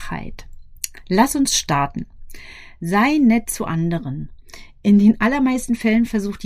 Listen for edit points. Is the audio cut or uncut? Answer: uncut